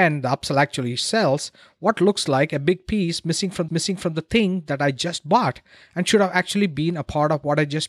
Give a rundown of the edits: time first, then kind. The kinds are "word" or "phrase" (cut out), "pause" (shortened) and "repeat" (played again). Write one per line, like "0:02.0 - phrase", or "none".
0:03.7 - repeat